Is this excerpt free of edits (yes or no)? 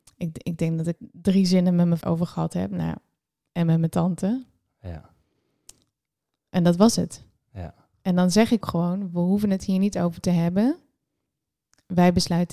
no